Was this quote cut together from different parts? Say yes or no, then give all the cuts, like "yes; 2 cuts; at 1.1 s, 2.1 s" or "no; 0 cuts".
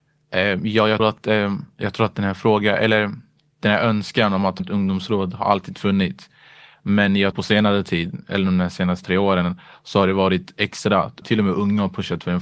yes; 5 cuts; at 1.0 s, 4.6 s, 7.3 s, 9.0 s, 11.2 s